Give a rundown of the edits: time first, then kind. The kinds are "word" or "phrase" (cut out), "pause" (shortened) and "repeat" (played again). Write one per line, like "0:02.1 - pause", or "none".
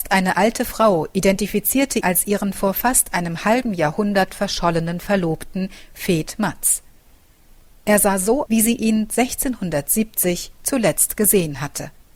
0:02.0 - word
0:08.5 - word